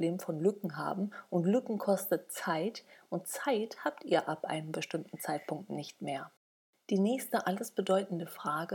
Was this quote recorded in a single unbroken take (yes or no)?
yes